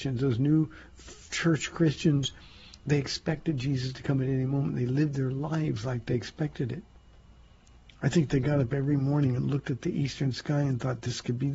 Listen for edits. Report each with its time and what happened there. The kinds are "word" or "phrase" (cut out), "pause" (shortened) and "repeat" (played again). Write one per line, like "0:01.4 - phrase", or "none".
none